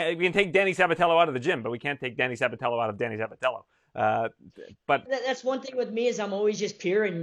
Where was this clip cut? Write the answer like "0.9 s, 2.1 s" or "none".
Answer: none